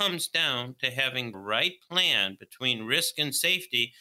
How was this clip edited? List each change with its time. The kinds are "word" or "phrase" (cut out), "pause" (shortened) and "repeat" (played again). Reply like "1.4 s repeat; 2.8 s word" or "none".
1.3 s word